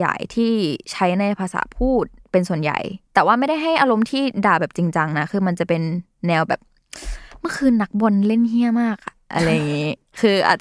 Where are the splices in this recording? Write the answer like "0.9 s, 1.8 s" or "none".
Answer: 3.0 s